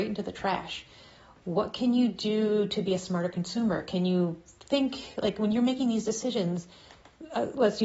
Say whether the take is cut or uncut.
uncut